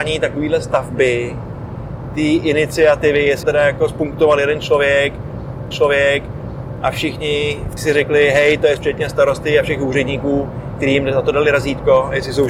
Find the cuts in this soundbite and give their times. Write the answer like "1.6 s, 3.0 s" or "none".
3.4 s, 5.7 s, 7.8 s, 8.8 s